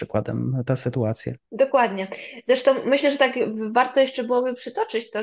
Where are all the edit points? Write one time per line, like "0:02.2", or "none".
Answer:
0:01.4